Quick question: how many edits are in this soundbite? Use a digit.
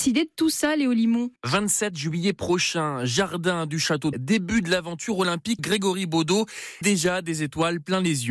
4